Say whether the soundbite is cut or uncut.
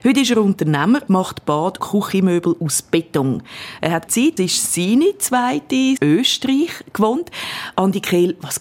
cut